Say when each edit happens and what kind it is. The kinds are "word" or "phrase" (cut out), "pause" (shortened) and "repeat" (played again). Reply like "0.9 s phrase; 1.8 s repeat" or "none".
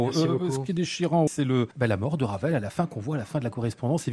1.3 s word; 1.7 s pause